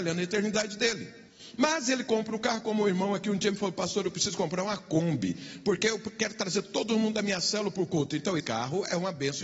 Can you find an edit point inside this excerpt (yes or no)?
yes